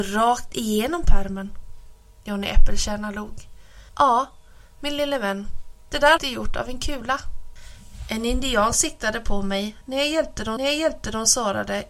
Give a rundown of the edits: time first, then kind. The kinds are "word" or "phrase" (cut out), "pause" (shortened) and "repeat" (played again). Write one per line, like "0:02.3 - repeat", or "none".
0:03.9 - pause
0:06.2 - word
0:10.6 - repeat